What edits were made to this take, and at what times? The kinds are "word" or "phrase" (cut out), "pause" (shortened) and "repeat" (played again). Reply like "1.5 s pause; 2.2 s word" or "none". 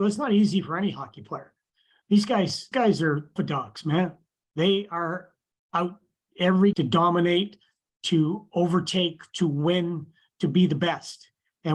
2.7 s word; 3.4 s word; 6.7 s word